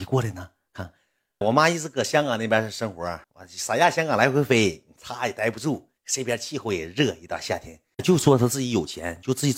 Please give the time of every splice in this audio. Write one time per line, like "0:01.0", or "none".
0:01.4
0:03.2
0:06.0